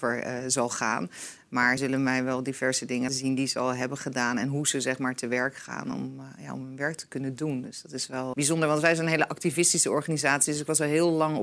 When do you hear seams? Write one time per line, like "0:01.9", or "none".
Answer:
0:01.8
0:03.1
0:08.3